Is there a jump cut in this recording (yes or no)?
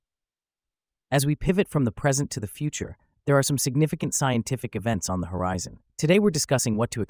no